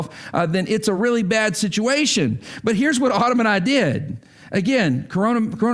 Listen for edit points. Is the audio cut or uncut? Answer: uncut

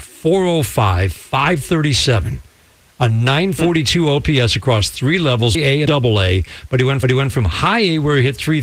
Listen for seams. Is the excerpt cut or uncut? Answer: cut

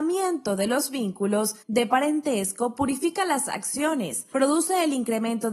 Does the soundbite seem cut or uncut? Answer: cut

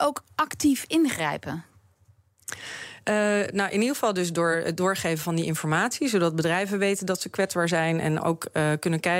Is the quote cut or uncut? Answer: uncut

